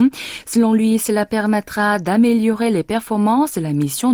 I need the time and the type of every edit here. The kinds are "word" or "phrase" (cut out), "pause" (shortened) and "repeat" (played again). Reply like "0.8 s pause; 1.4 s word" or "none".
none